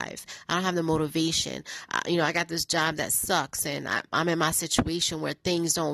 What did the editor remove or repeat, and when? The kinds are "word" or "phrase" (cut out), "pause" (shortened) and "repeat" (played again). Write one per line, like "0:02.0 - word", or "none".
none